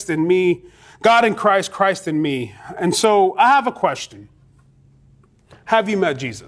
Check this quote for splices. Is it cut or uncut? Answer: uncut